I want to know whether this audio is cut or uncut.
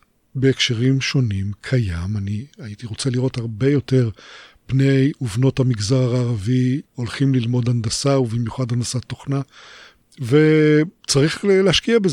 cut